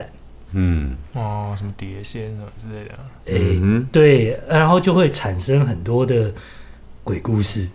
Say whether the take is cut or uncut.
uncut